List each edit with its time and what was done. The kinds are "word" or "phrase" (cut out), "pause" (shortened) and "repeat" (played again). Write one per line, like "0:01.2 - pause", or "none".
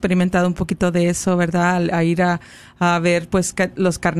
none